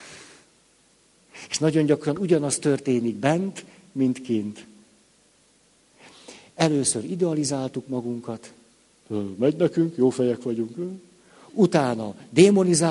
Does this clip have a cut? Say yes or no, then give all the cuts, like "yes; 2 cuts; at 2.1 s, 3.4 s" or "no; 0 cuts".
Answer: no; 0 cuts